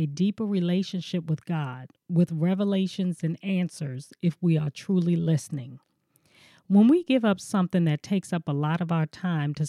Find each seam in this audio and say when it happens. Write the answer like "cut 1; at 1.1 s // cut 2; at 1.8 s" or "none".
none